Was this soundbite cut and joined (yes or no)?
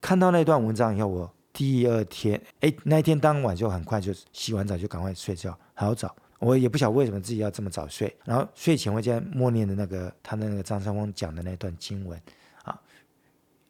yes